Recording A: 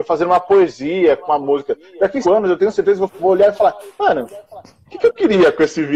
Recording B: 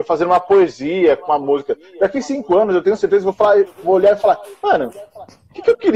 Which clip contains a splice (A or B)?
A